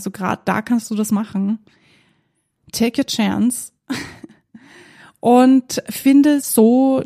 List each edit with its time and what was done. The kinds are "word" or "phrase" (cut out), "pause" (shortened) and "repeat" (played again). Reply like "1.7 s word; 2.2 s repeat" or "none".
none